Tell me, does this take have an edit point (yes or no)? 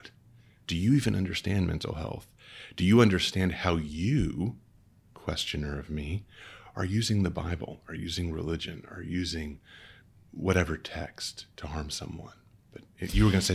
no